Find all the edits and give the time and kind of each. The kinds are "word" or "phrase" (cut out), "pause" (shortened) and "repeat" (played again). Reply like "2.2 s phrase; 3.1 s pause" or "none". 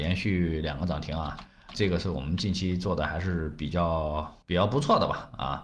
1.7 s word; 4.4 s pause